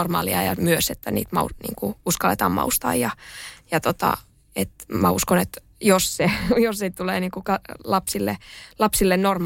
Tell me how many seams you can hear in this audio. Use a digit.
0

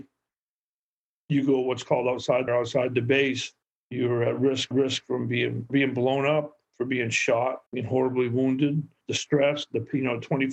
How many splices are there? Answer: 6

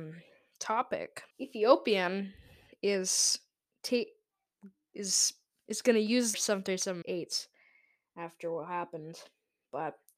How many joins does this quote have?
4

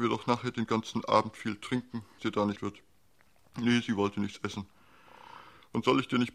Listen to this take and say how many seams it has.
2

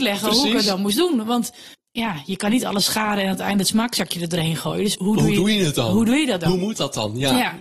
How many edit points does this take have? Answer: 2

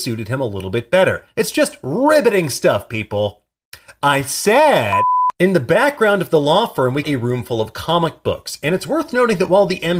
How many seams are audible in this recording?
1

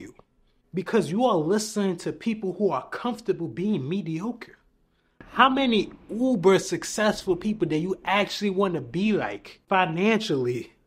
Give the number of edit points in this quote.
0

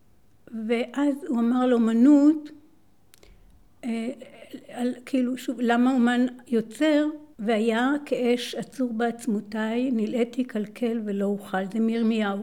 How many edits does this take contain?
1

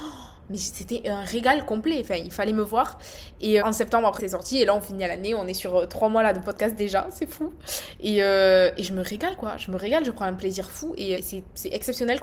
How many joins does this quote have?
3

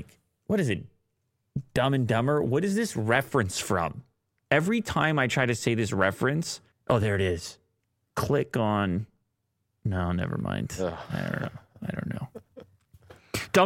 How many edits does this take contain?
2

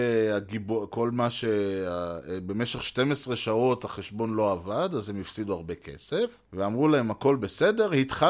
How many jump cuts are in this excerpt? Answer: 1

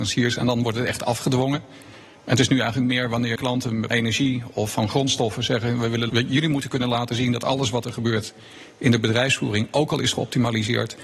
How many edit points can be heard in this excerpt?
3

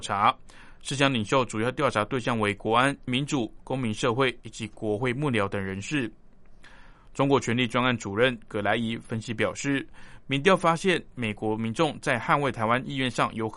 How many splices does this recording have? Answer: 1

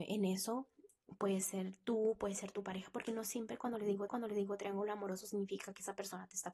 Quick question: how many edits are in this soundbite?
1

